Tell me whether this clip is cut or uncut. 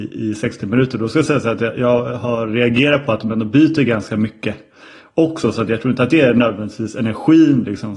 uncut